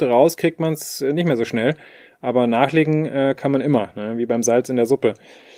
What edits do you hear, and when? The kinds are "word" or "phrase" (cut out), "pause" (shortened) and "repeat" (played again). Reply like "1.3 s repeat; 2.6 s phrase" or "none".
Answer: none

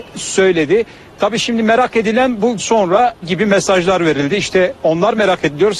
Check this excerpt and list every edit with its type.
2.6 s word; 3.2 s word

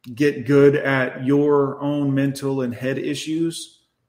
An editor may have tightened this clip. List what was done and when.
none

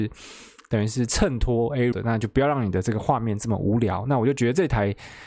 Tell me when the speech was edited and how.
1.9 s word

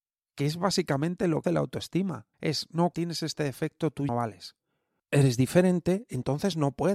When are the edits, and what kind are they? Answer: 1.4 s word; 2.3 s pause; 2.9 s word; 4.1 s phrase

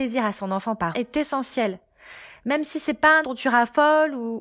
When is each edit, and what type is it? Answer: 0.9 s word; 3.2 s word

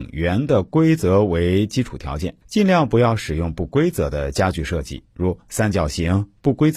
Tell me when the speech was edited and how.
2.4 s pause

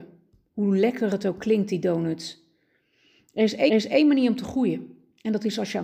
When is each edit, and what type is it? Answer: 3.7 s repeat

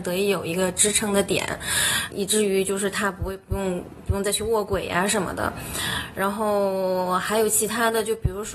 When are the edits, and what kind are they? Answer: 2.1 s word

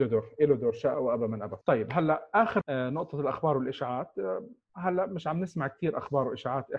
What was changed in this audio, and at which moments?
0.9 s phrase; 1.6 s pause; 2.6 s word

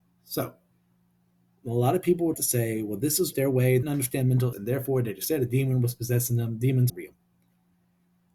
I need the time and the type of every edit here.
2.3 s word; 3.3 s word; 3.8 s word; 4.5 s word; 6.9 s word

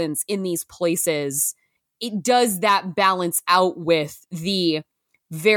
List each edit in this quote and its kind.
none

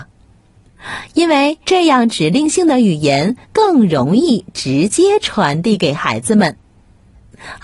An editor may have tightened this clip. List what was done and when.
1.6 s pause; 3.4 s pause

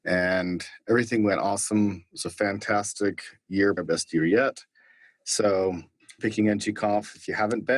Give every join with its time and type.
3.8 s word; 6.2 s word

